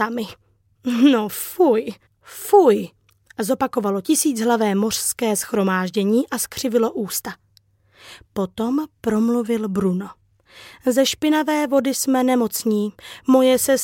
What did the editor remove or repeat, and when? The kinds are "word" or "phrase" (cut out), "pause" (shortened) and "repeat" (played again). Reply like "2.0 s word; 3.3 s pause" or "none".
2.1 s pause